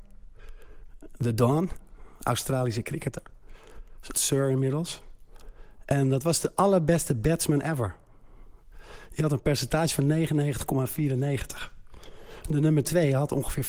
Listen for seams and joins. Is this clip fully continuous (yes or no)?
no